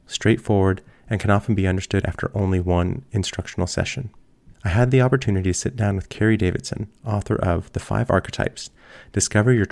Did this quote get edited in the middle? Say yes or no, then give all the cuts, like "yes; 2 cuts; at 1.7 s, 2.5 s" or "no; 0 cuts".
yes; 2 cuts; at 2.0 s, 4.5 s